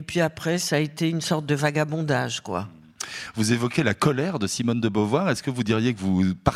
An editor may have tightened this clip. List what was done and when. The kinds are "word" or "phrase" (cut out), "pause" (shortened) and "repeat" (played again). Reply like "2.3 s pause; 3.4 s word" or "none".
none